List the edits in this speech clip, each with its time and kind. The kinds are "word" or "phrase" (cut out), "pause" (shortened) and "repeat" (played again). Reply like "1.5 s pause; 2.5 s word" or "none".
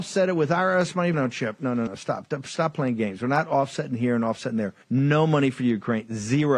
1.1 s word; 1.9 s word; 4.8 s pause